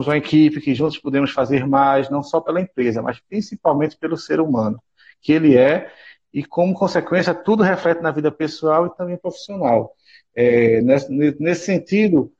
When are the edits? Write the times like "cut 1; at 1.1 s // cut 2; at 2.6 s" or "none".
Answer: none